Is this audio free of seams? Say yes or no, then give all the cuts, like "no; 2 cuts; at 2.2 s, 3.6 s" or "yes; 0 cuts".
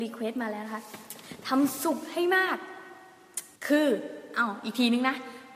no; 1 cut; at 3.6 s